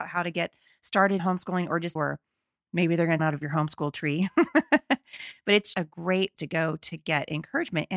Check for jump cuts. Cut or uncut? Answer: cut